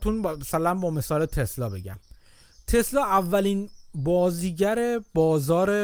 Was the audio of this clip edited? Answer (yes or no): no